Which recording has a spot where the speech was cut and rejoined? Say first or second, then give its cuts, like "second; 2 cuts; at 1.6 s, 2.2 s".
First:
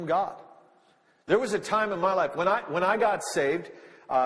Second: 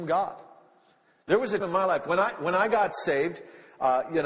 second; 1 cut; at 1.6 s